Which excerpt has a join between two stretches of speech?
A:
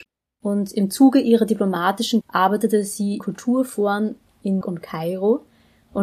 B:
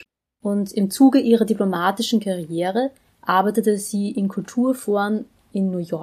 A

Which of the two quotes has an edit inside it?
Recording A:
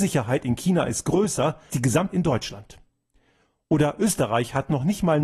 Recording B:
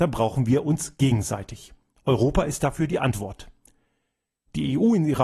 A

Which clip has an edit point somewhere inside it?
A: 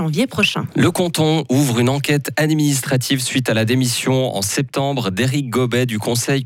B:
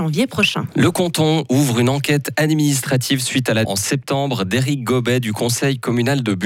B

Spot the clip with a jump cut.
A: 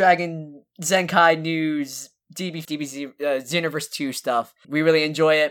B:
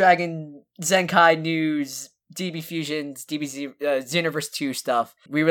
A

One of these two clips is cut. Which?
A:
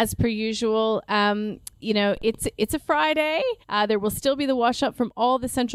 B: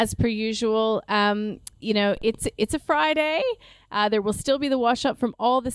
A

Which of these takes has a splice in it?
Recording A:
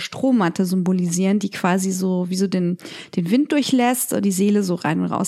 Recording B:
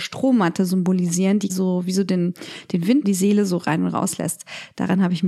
B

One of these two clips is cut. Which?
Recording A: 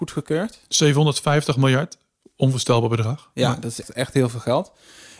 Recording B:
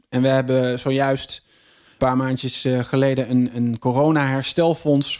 A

